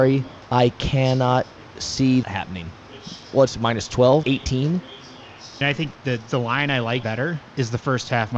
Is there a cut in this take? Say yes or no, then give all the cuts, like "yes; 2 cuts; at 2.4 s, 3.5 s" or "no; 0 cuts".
yes; 5 cuts; at 2.2 s, 4.2 s, 5.6 s, 7.0 s, 7.5 s